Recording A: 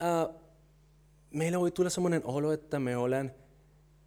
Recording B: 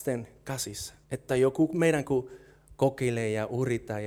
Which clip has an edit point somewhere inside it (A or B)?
B